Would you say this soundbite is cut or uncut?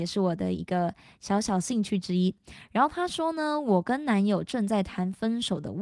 uncut